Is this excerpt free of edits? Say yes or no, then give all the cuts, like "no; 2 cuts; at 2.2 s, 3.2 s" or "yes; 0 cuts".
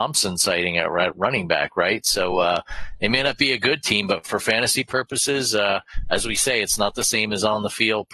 yes; 0 cuts